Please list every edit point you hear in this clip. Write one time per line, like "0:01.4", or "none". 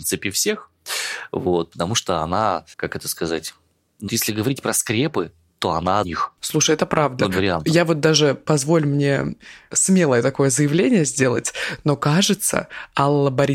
0:02.7
0:04.1
0:06.0
0:06.4
0:07.3
0:09.7

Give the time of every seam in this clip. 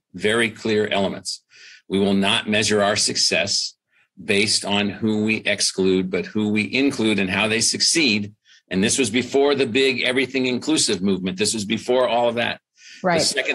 none

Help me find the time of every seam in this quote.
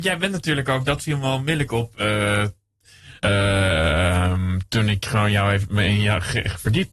0:03.2

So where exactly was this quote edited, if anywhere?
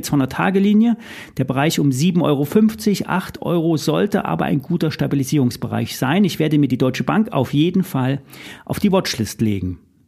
none

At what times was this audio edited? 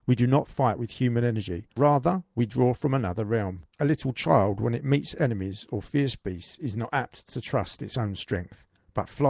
0:01.7
0:03.7

